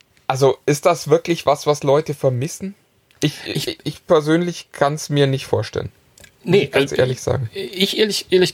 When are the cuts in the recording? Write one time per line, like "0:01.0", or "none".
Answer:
none

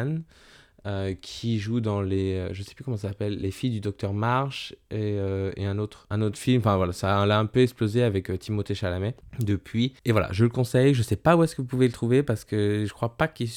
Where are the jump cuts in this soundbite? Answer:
0:10.0

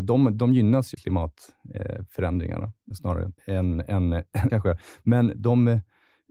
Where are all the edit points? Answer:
0:00.9
0:02.9
0:03.4
0:04.5

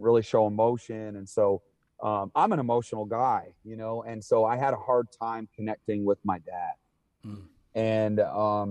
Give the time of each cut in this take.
none

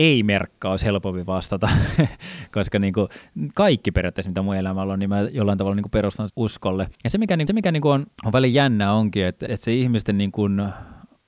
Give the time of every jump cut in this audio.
0:06.3
0:06.9
0:07.5
0:08.1
0:09.5

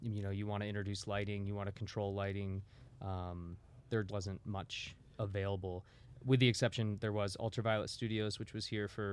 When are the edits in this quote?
0:04.1

